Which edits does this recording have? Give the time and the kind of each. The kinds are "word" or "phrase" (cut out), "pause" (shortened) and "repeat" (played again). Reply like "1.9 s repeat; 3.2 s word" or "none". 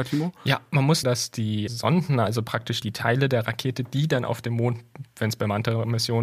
1.0 s phrase; 1.7 s word; 2.8 s word